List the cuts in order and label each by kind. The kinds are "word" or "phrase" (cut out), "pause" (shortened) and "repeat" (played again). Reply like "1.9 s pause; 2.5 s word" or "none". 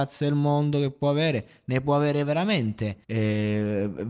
3.0 s pause

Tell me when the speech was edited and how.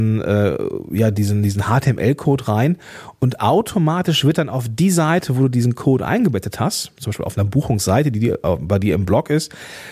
none

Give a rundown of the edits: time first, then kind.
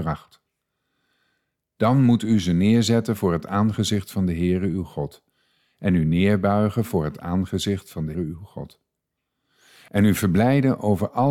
8.1 s word

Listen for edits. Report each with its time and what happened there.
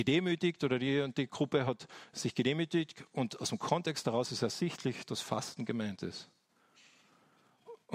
none

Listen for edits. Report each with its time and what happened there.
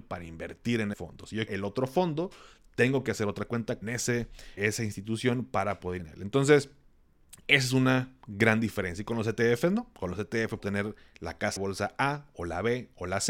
0.9 s word; 1.5 s word; 3.8 s word; 4.6 s word; 6.0 s word; 7.4 s word; 10.6 s word; 11.6 s word

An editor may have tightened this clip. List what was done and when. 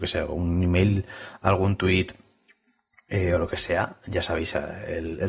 none

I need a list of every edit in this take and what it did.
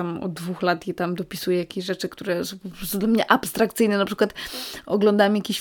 none

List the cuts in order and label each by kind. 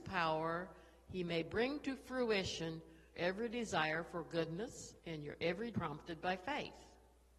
3.1 s word; 5.0 s pause; 5.7 s word

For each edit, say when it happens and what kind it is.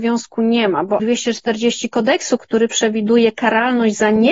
1.0 s word; 2.4 s word

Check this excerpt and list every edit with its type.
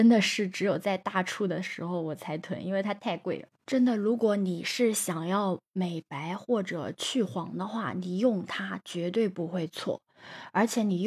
3.5 s pause

